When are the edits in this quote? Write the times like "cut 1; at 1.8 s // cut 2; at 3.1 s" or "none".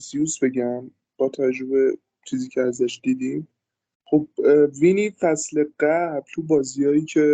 none

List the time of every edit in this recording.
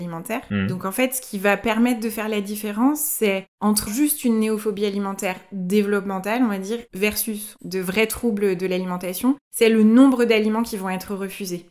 cut 1; at 3.9 s

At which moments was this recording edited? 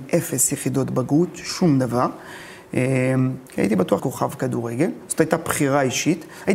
cut 1; at 3.5 s // cut 2; at 4.0 s

